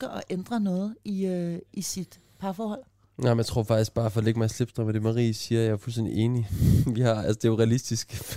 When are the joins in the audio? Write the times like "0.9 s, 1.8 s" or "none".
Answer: none